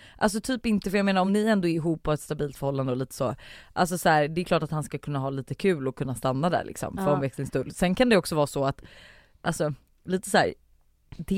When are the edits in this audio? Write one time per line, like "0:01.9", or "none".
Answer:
none